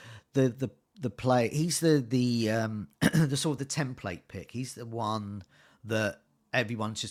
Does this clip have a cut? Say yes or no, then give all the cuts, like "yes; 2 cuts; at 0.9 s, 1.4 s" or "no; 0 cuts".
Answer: no; 0 cuts